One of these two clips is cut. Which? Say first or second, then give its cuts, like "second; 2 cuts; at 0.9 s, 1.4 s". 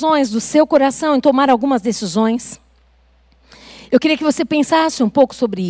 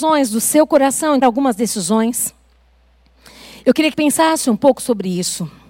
second; 2 cuts; at 1.2 s, 3.9 s